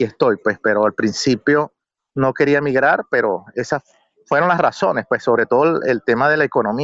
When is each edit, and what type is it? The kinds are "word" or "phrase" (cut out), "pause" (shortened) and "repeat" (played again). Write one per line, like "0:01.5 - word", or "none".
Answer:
none